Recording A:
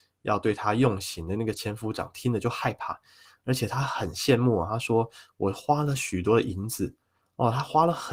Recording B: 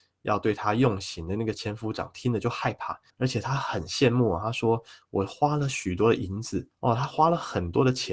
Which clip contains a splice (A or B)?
B